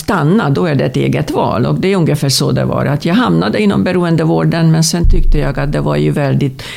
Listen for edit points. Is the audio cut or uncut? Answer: uncut